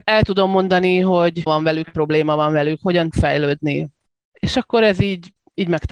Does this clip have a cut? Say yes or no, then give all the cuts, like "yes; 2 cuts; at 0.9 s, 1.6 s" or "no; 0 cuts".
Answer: yes; 3 cuts; at 1.5 s, 1.9 s, 3.1 s